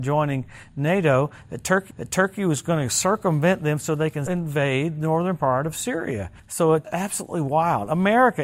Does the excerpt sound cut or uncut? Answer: cut